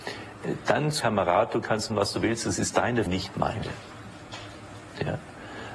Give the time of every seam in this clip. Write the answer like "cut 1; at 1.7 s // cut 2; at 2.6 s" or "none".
cut 1; at 1.0 s // cut 2; at 1.9 s // cut 3; at 3.1 s